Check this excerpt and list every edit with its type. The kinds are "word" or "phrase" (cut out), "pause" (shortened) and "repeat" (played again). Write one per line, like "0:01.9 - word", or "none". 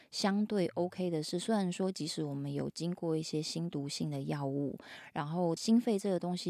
0:05.6 - phrase